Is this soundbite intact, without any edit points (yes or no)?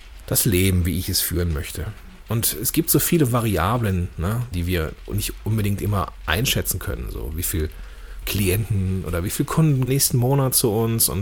no